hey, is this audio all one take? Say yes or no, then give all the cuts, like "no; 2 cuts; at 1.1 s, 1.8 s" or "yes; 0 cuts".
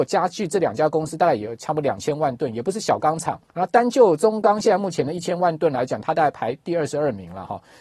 no; 1 cut; at 3.4 s